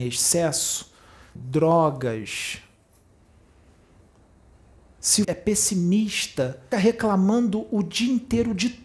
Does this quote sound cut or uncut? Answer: cut